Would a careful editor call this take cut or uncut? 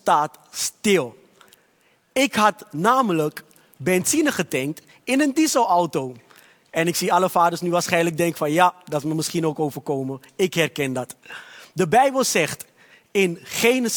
uncut